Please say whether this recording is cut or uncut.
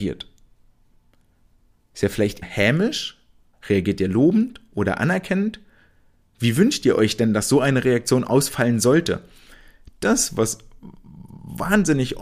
cut